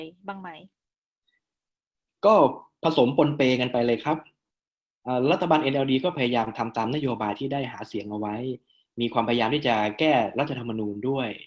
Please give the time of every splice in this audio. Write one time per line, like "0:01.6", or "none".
none